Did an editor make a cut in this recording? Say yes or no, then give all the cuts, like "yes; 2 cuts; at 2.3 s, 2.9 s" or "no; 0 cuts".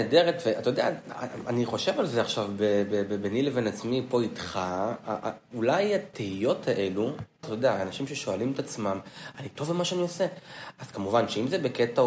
yes; 1 cut; at 7.4 s